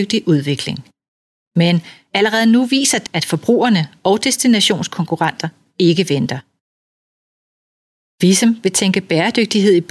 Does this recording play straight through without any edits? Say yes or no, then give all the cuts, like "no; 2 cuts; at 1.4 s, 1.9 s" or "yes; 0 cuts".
no; 1 cut; at 3.1 s